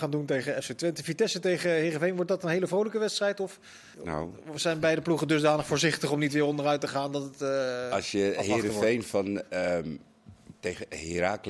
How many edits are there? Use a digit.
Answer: 1